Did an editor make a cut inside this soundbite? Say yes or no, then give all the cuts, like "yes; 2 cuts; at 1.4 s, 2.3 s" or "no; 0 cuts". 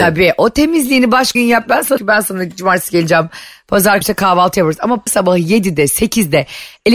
yes; 4 cuts; at 1.4 s, 2.0 s, 4.0 s, 5.1 s